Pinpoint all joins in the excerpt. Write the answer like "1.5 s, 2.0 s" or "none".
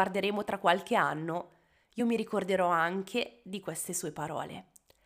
none